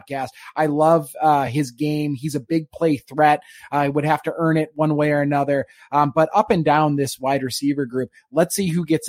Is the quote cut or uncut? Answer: uncut